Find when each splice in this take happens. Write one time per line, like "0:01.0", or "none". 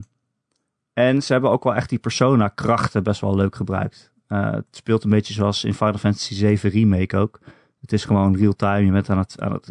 none